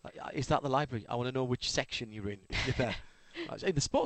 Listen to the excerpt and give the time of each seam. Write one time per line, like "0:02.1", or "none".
none